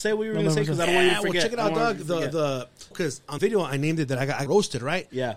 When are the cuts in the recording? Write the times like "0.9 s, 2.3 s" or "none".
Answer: 2.9 s, 3.4 s, 4.5 s